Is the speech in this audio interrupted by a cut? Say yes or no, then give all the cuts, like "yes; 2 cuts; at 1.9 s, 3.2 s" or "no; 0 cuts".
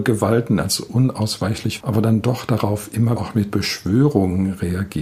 yes; 2 cuts; at 1.8 s, 3.2 s